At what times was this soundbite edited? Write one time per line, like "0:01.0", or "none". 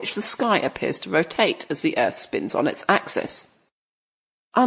none